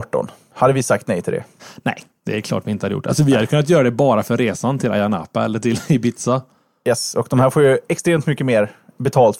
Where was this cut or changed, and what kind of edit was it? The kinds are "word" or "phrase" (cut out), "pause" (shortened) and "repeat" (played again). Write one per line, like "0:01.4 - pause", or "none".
none

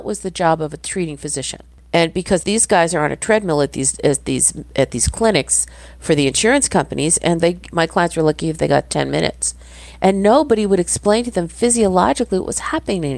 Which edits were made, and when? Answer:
0:02.4 - word
0:07.4 - word

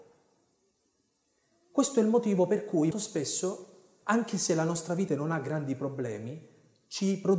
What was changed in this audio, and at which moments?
0:02.9 - word
0:05.1 - word

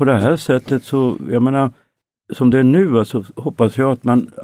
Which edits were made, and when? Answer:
none

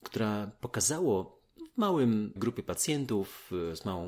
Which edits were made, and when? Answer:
0:02.4 - word

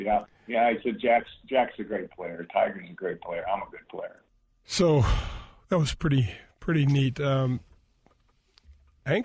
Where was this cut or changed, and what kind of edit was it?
none

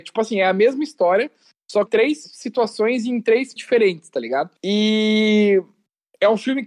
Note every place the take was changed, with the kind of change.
0:01.9 - phrase
0:03.6 - word
0:04.6 - pause

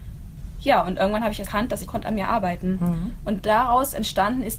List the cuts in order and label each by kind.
0:01.4 - word
0:01.9 - phrase

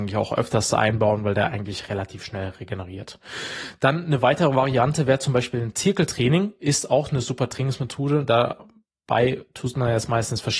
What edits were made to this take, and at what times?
none

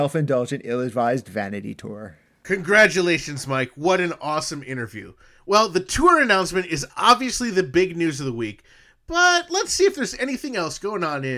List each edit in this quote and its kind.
none

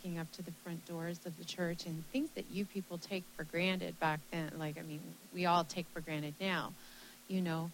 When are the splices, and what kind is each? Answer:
none

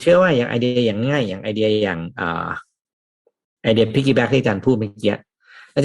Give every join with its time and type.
none

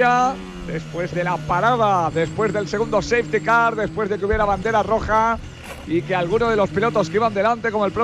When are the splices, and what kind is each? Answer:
none

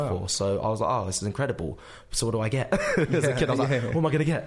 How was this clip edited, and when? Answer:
none

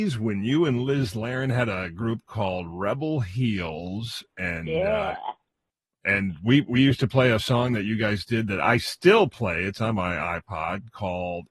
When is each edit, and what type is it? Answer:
none

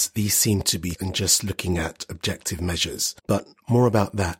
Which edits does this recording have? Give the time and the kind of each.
0:00.9 - word
0:03.2 - pause

